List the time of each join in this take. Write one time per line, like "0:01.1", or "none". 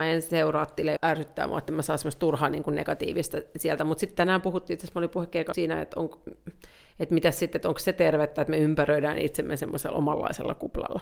0:01.0
0:05.5